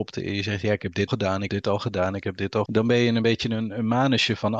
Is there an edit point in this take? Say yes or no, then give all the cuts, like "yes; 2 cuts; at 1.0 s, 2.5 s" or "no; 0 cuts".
yes; 3 cuts; at 1.1 s, 1.5 s, 2.7 s